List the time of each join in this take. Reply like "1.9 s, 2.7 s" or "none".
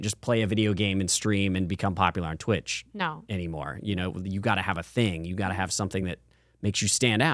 none